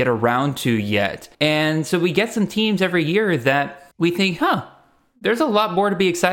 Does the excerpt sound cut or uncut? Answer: cut